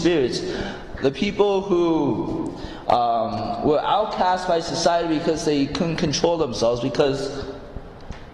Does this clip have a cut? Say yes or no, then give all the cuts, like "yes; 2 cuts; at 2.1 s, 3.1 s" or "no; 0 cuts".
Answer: no; 0 cuts